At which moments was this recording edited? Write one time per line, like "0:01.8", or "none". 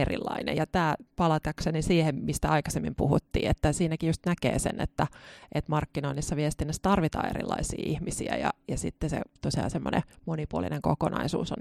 0:01.1